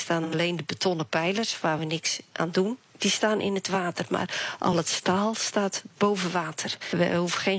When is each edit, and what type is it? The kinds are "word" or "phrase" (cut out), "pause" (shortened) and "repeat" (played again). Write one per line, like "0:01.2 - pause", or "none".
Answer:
none